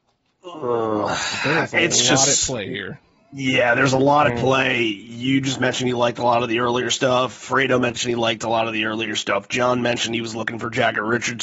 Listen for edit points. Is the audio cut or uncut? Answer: uncut